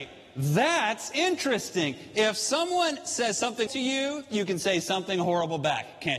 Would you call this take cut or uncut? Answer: cut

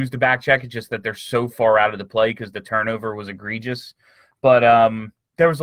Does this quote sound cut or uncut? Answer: uncut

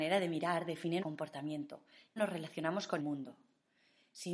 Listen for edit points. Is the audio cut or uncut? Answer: cut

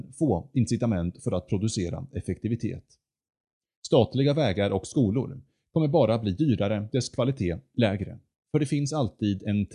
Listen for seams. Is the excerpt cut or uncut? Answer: cut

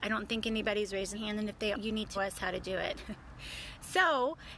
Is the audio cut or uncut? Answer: cut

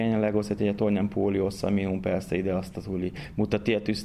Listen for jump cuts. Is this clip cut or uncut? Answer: uncut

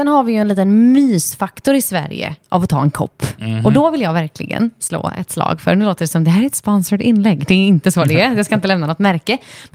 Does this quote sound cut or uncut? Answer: uncut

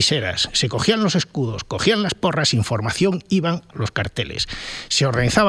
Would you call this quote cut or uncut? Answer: cut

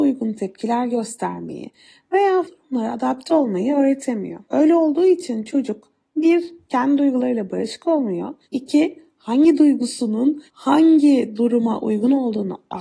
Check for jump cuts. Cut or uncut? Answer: cut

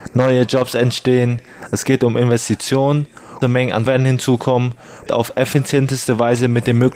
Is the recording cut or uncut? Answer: cut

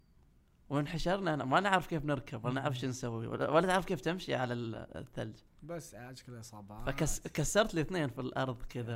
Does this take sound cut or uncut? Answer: uncut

